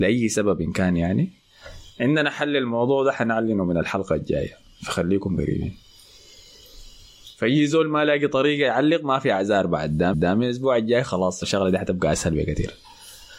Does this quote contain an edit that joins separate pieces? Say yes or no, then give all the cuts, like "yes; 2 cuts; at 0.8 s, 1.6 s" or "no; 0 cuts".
yes; 2 cuts; at 10.1 s, 11.4 s